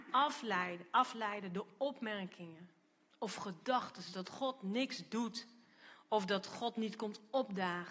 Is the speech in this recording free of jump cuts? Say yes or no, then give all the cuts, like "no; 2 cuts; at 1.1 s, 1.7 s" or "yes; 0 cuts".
yes; 0 cuts